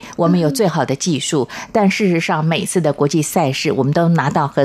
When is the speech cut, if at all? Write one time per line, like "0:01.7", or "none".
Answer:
none